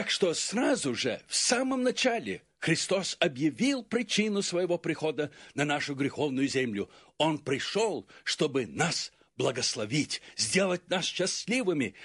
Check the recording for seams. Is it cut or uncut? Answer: uncut